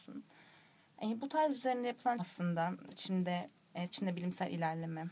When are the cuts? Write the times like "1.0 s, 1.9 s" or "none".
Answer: 1.5 s, 2.2 s, 2.9 s, 3.9 s